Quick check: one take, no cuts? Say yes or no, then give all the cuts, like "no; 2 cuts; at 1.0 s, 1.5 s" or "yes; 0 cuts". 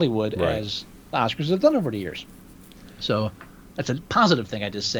yes; 0 cuts